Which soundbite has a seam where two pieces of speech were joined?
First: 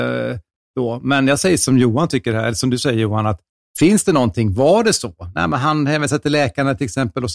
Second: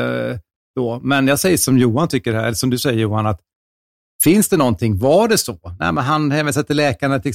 first; 1 cut; at 3.5 s

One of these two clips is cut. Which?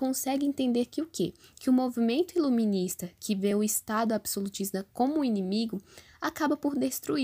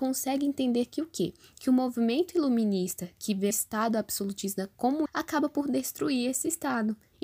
second; 2 cuts; at 3.5 s, 5.1 s

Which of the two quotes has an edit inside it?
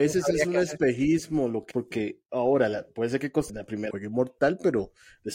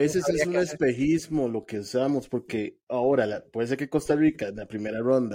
first; 3 cuts; at 1.7 s, 3.5 s, 3.9 s

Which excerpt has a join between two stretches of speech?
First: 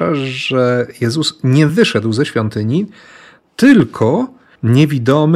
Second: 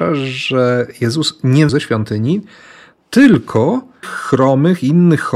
second; 2 cuts; at 1.7 s, 4.0 s

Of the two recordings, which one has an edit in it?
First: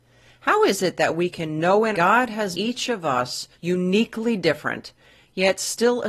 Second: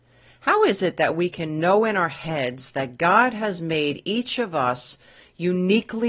first; 3 cuts; at 1.9 s, 2.5 s, 3.5 s

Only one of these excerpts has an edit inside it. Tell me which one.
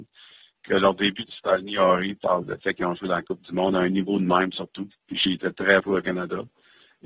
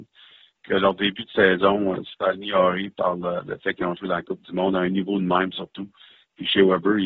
first; 5 cuts; at 1.3 s, 2.4 s, 4.9 s, 5.3 s, 5.8 s

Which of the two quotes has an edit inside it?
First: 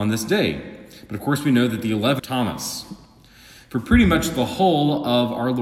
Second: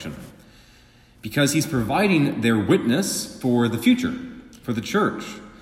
first; 1 cut; at 2.2 s

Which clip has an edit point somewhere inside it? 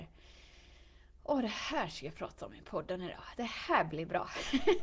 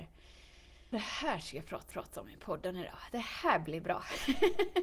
second; 2 cuts; at 0.9 s, 1.9 s

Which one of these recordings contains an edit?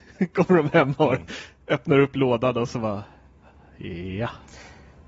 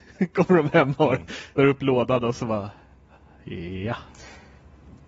second; 1 cut; at 1.6 s

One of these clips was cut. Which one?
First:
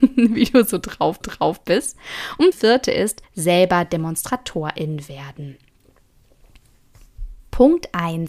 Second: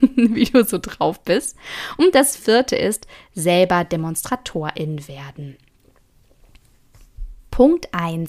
first; 3 cuts; at 1.2 s, 2.5 s, 3.2 s

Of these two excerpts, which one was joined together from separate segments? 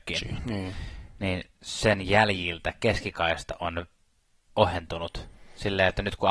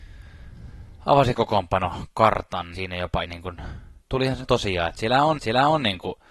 second; 6 cuts; at 1.3 s, 2.7 s, 3.2 s, 4.0 s, 4.4 s, 5.4 s

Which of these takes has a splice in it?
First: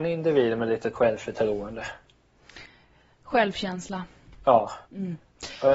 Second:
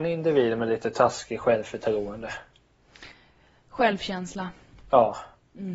first; 2 cuts; at 0.9 s, 4.8 s

